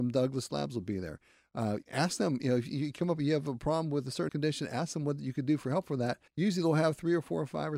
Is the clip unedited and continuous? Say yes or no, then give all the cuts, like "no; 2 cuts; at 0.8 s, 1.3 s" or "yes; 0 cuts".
no; 3 cuts; at 1.8 s, 4.3 s, 6.3 s